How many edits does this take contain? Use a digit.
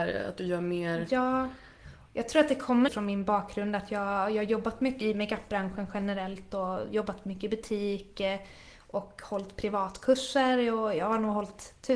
2